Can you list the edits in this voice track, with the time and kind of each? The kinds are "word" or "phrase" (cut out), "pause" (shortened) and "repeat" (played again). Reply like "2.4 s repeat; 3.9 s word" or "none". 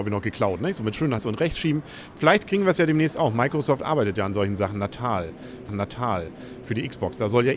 1.2 s word; 5.7 s repeat